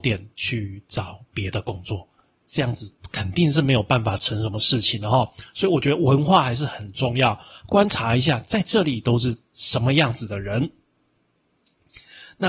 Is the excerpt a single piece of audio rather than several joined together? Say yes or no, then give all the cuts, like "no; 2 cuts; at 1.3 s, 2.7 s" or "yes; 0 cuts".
yes; 0 cuts